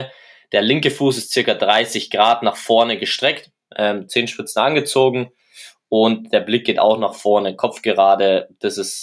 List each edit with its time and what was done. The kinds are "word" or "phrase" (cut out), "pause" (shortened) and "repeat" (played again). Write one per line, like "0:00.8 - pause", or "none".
none